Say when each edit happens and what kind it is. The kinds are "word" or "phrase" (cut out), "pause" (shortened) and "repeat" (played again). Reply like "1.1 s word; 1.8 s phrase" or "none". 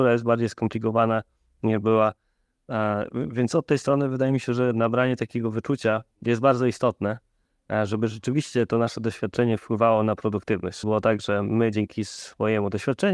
10.8 s word